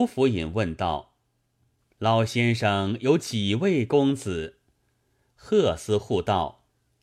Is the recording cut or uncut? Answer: uncut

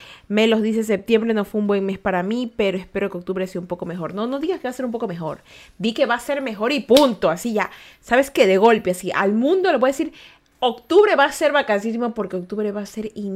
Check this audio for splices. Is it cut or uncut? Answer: uncut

